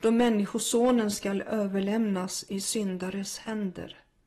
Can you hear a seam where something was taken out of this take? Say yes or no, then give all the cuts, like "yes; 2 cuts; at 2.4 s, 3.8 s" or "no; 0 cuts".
no; 0 cuts